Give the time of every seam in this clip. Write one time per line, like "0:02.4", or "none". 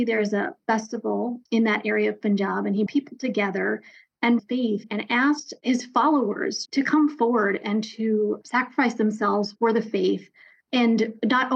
0:02.9
0:04.4